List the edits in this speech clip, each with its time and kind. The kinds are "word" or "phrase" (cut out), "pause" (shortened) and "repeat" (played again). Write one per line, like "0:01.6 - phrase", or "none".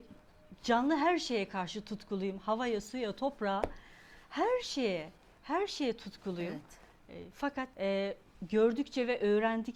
0:07.7 - pause

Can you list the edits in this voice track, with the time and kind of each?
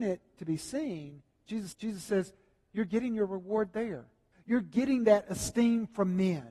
0:01.7 - repeat
0:04.3 - pause

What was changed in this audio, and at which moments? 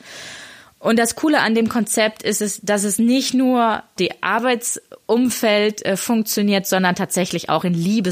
0:04.0 - word

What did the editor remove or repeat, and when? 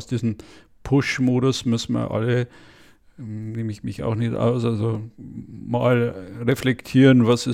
none

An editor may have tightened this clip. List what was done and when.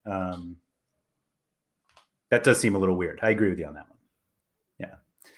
none

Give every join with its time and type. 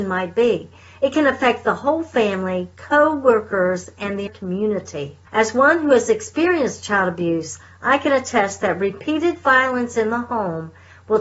0:04.3 - word
0:05.3 - pause

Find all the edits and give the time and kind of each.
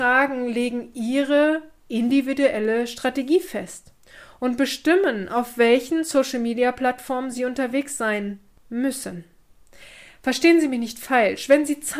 none

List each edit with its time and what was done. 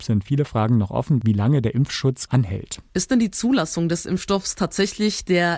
0:01.2 - word
0:02.3 - word

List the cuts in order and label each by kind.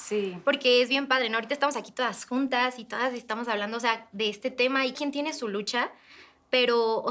0:04.9 - word

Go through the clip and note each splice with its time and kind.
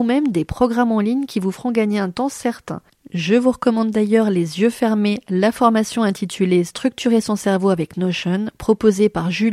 none

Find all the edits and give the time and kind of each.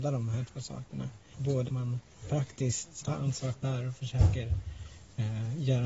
0:01.7 - word
0:03.0 - word
0:03.5 - word

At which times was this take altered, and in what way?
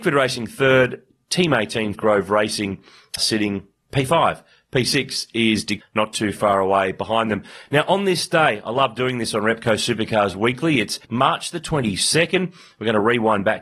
0:01.9 - phrase
0:03.2 - word
0:05.8 - phrase
0:11.0 - pause

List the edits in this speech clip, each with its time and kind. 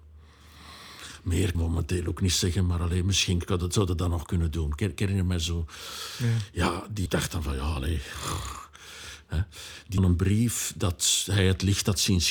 0:01.5 - phrase
0:07.1 - word
0:10.0 - phrase

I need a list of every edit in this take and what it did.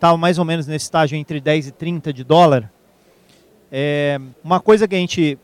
0:04.3 - pause

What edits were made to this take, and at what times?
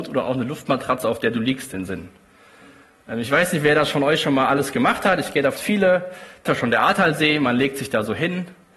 0:01.7 - word
0:05.6 - word
0:06.5 - word

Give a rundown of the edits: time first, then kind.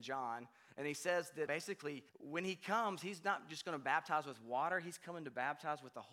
0:01.5 - word
0:02.1 - pause

